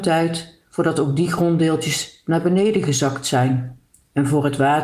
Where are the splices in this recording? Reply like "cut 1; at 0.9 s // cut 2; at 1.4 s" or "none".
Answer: none